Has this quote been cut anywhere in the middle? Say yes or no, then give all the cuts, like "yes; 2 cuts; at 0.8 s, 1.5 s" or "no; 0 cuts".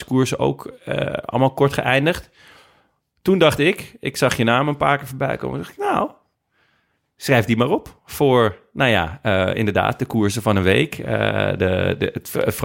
no; 0 cuts